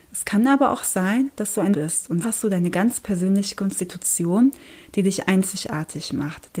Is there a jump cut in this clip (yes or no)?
yes